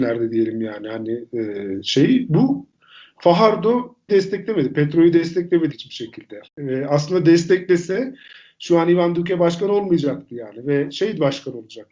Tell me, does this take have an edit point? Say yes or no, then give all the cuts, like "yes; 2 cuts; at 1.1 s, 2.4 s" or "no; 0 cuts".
yes; 3 cuts; at 4.1 s, 5.7 s, 6.5 s